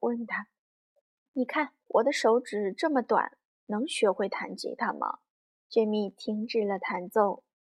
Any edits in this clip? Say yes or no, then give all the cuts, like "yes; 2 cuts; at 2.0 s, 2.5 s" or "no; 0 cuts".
yes; 2 cuts; at 1.8 s, 5.6 s